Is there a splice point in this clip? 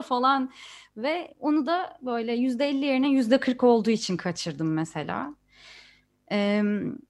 no; 0 cuts

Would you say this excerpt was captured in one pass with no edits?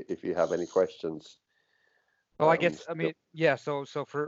no; 1 cut; at 3.2 s

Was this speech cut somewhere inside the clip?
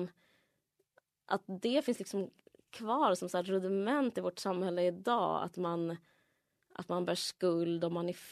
no; 0 cuts

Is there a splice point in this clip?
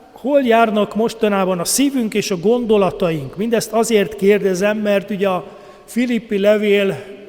no; 0 cuts

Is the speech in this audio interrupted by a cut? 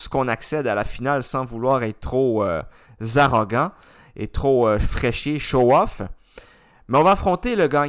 no; 0 cuts

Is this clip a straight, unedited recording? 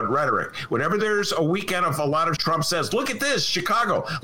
no; 1 cut; at 2.4 s

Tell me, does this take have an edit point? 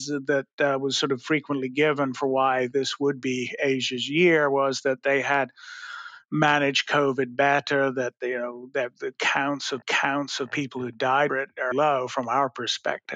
yes; 4 cuts; at 8.9 s, 9.8 s, 11.3 s, 11.7 s

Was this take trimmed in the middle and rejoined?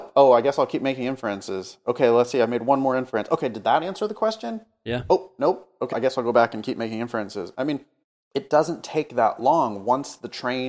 yes; 2 cuts; at 5.9 s, 8.0 s

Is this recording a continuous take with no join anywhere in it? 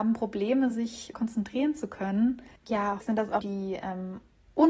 no; 3 cuts; at 1.1 s, 3.0 s, 3.4 s

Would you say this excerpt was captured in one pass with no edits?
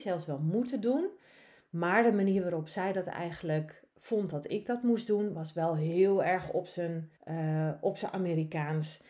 no; 1 cut; at 7.2 s

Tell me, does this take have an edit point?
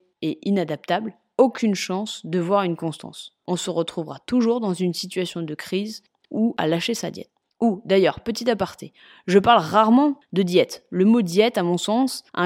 no; 0 cuts

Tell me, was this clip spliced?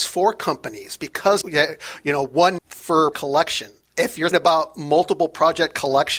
yes; 4 cuts; at 1.4 s, 2.6 s, 3.1 s, 4.3 s

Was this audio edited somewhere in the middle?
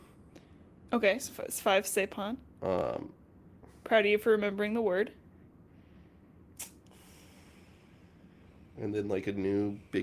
no; 0 cuts

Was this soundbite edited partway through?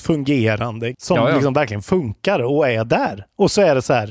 yes; 1 cut; at 0.9 s

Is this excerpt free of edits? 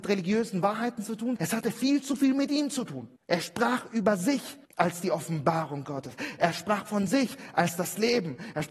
no; 3 cuts; at 1.4 s, 3.2 s, 4.7 s

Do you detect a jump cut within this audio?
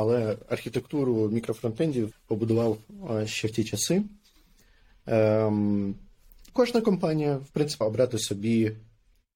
yes; 3 cuts; at 2.1 s, 6.5 s, 7.8 s

